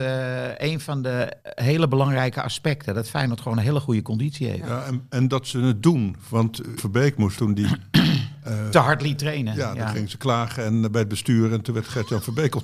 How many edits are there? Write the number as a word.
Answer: three